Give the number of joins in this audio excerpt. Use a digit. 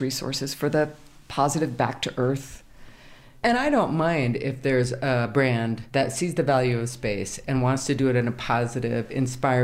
1